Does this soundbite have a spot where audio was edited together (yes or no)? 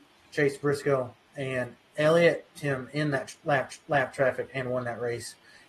yes